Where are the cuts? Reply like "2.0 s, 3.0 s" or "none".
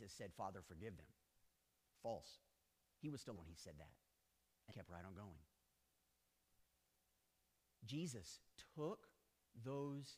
3.4 s, 4.7 s